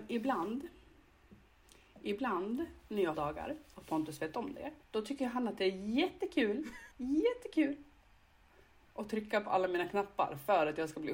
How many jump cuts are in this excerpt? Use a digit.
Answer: 3